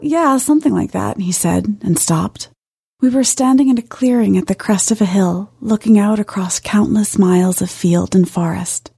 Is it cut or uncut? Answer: uncut